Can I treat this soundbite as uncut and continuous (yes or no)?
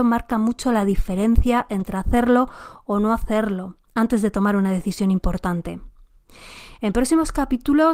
yes